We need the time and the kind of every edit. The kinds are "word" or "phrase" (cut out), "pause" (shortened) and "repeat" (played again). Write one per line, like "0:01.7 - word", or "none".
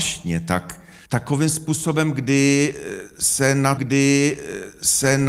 0:01.0 - pause
0:03.8 - repeat